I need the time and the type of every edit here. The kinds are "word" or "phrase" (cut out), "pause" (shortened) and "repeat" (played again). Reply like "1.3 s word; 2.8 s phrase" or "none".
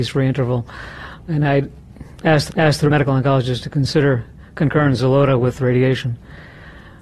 2.5 s repeat